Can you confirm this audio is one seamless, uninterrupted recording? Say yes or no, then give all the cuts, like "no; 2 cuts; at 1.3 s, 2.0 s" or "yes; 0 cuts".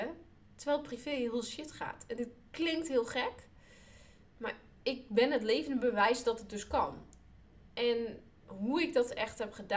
yes; 0 cuts